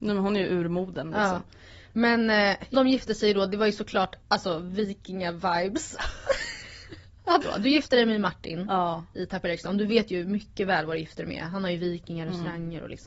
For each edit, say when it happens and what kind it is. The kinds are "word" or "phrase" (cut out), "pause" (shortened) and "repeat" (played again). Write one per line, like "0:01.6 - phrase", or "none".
0:02.7 - word
0:04.2 - pause
0:07.4 - phrase